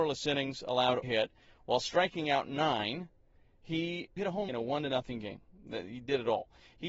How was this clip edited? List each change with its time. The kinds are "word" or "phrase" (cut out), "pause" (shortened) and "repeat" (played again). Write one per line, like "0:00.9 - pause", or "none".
0:01.0 - phrase
0:04.2 - word
0:04.5 - phrase